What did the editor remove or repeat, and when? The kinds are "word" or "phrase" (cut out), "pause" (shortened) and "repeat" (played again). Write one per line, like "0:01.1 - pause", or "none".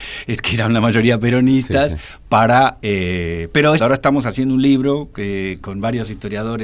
0:03.8 - word
0:05.6 - word